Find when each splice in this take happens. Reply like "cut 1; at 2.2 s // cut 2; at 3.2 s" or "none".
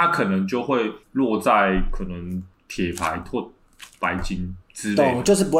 cut 1; at 1.0 s // cut 2; at 4.6 s